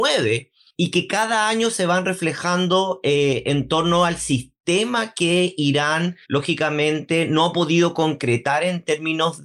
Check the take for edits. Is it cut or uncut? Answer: cut